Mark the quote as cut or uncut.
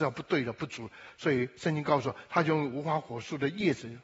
uncut